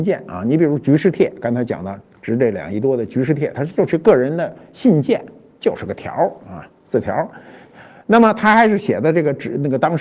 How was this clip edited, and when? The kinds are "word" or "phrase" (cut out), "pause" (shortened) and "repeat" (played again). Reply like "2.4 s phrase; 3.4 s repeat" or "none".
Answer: none